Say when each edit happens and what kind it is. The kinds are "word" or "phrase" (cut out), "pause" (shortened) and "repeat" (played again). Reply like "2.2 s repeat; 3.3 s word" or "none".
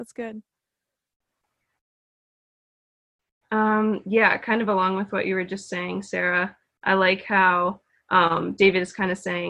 none